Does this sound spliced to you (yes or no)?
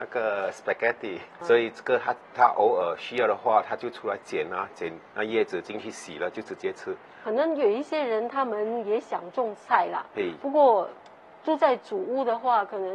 yes